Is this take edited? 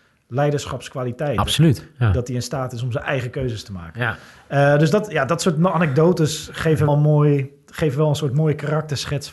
yes; 1 cut; at 6.9 s

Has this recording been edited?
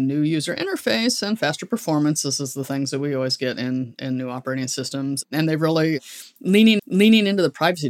yes; 1 cut; at 6.8 s

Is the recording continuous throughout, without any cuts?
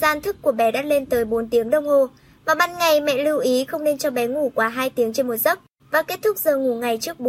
yes; 0 cuts

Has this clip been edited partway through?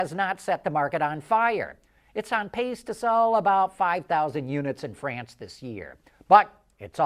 no; 0 cuts

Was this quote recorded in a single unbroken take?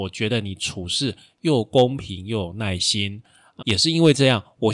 no; 1 cut; at 3.6 s

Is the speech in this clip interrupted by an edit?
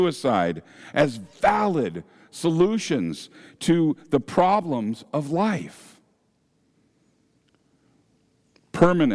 no; 0 cuts

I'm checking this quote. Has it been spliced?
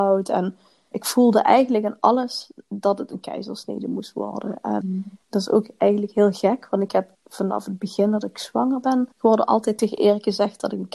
yes; 4 cuts; at 0.9 s, 4.8 s, 7.1 s, 9.1 s

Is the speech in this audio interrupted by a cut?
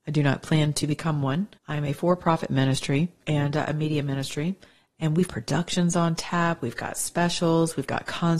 yes; 3 cuts; at 1.6 s, 3.2 s, 5.3 s

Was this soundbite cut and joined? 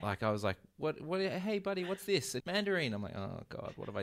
yes; 1 cut; at 2.4 s

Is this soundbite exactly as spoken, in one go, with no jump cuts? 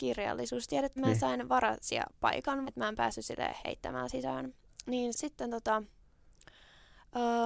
no; 3 cuts; at 1.0 s, 2.6 s, 5.1 s

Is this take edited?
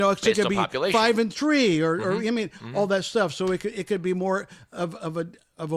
no; 0 cuts

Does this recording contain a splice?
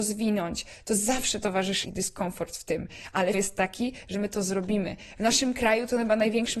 yes; 2 cuts; at 1.8 s, 3.3 s

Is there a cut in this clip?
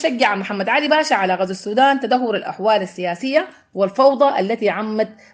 no; 0 cuts

